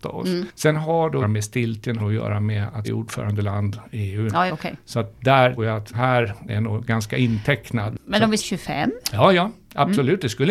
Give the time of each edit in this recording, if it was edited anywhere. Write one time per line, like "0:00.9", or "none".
0:01.2
0:02.0
0:02.8
0:04.5
0:05.6
0:05.9
0:06.5
0:08.4